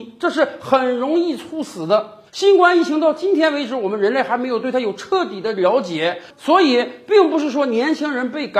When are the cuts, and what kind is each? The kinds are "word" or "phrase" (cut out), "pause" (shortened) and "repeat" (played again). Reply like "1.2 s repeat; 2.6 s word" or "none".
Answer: 2.3 s pause